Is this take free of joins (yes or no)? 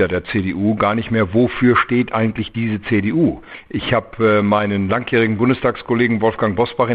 yes